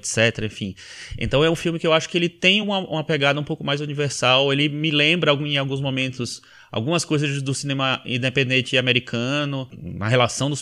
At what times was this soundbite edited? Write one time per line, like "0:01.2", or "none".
none

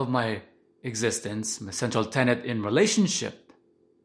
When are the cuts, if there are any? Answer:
none

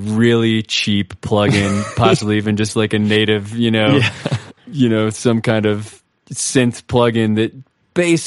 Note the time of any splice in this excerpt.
0:04.6

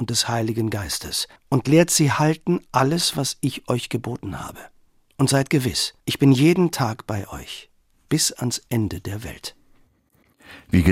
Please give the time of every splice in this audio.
0:01.4
0:04.9
0:06.0
0:07.8

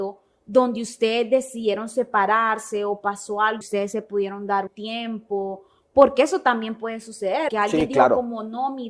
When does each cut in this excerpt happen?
0:03.6
0:04.7
0:07.5

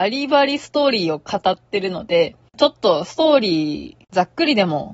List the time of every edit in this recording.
none

